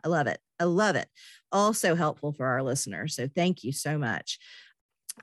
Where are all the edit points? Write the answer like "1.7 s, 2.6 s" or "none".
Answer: none